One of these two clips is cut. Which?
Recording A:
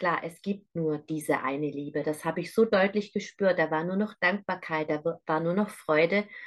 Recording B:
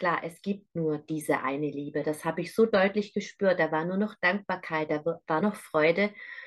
B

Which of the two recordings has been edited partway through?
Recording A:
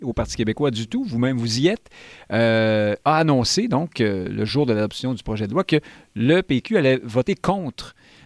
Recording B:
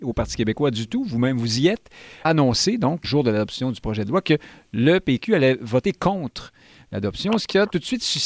B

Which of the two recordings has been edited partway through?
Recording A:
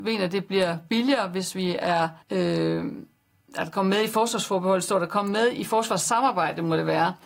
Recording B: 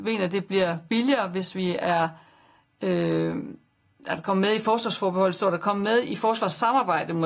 A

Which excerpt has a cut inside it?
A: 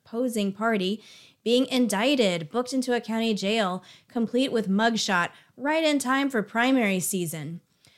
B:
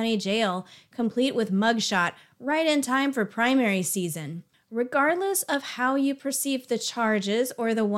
B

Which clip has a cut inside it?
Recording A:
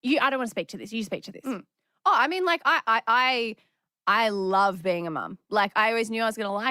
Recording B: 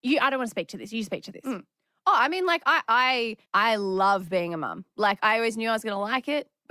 B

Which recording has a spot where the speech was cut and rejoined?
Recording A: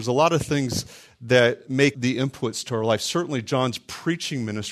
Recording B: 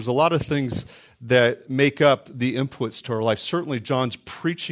A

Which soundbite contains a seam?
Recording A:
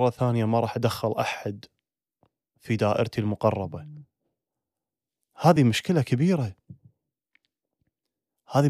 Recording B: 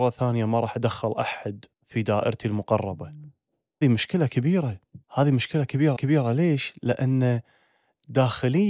B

